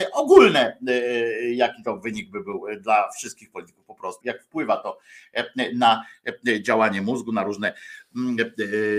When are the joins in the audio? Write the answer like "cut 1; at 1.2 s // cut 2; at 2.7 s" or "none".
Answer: cut 1; at 4.2 s